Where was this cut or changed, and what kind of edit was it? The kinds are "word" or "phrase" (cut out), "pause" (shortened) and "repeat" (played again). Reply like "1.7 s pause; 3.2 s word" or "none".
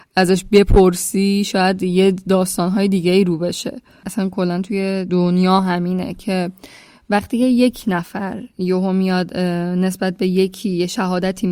none